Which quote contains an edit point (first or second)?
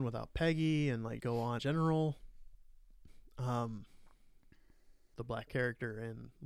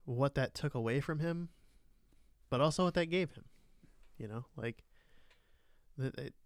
first